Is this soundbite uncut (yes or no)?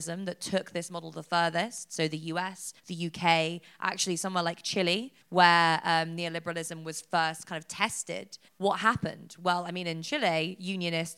no